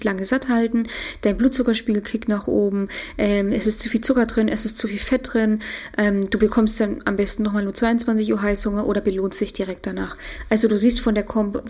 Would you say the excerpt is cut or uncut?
uncut